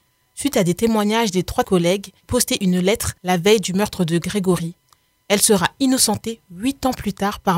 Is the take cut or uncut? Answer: cut